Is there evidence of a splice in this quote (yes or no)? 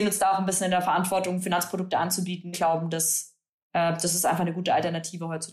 yes